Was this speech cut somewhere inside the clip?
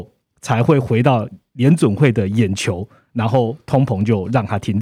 no; 0 cuts

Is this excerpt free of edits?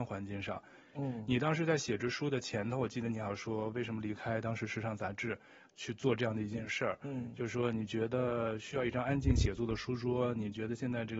no; 1 cut; at 0.9 s

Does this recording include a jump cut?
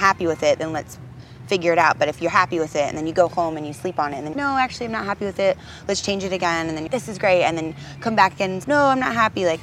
yes; 3 cuts; at 4.3 s, 6.9 s, 8.6 s

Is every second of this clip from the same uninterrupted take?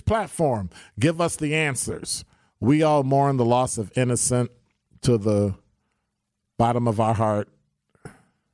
yes; 0 cuts

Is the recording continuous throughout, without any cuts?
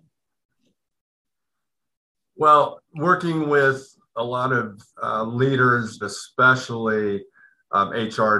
no; 3 cuts; at 2.8 s, 4.9 s, 6.0 s

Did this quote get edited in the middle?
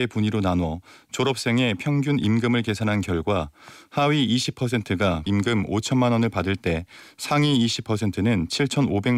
yes; 1 cut; at 5.3 s

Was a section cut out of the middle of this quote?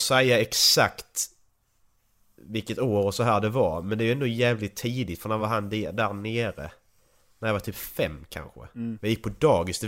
no; 0 cuts

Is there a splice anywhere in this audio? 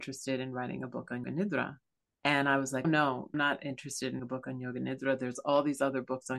yes; 5 cuts; at 1.2 s, 2.0 s, 2.8 s, 3.3 s, 4.2 s

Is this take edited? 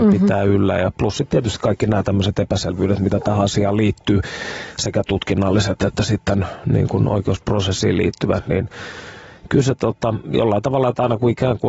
no; 0 cuts

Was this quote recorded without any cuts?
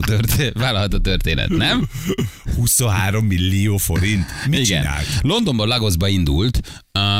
yes; 0 cuts

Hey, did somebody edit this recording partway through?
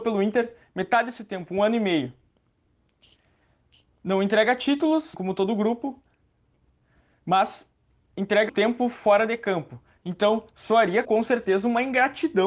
yes; 3 cuts; at 5.1 s, 8.5 s, 11.0 s

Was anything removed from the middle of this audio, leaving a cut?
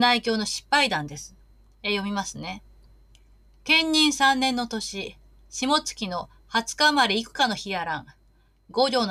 no; 0 cuts

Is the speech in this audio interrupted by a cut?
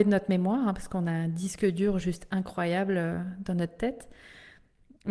no; 0 cuts

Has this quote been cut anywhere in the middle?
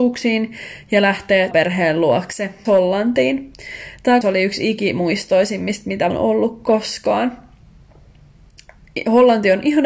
yes; 4 cuts; at 1.5 s, 2.6 s, 4.2 s, 6.1 s

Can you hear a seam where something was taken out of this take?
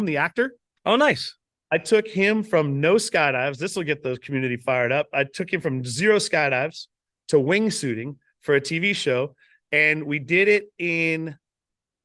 no; 0 cuts

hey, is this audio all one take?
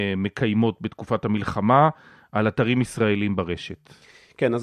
yes; 0 cuts

